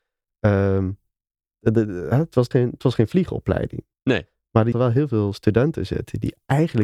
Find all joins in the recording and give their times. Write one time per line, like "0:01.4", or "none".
0:01.5
0:02.5
0:04.7